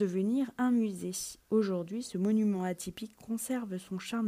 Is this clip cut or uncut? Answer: uncut